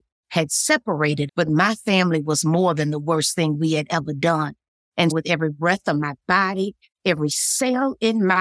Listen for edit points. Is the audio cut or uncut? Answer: cut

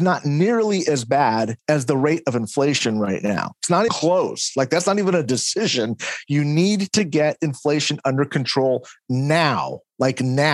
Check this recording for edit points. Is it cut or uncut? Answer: cut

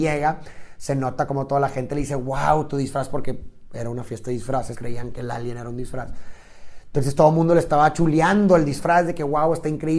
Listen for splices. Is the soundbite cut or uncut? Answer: cut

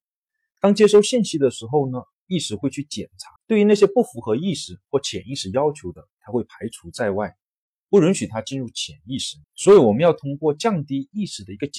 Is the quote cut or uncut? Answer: cut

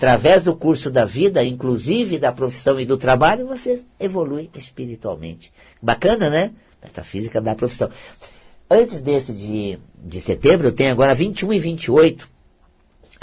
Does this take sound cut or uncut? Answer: uncut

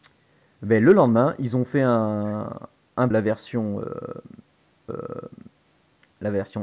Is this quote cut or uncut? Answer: cut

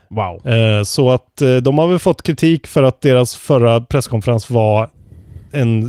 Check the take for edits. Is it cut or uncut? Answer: uncut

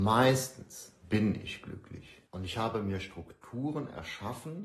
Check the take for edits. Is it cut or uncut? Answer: cut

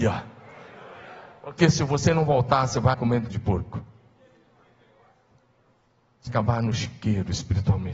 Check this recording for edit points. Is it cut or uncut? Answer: cut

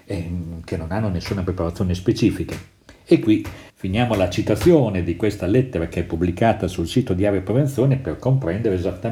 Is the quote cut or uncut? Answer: cut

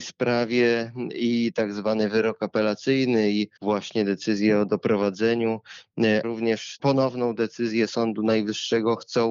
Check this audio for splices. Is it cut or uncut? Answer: cut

